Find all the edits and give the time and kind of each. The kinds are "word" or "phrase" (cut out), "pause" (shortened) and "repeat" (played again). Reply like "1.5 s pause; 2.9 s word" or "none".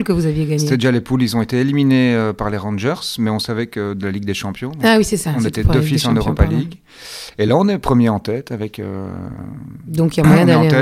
none